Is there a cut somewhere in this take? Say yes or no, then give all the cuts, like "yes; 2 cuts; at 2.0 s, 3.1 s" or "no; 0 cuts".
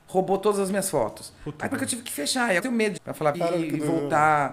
yes; 4 cuts; at 1.7 s, 2.6 s, 3.0 s, 3.3 s